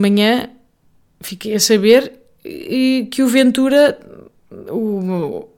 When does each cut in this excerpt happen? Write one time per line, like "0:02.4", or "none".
none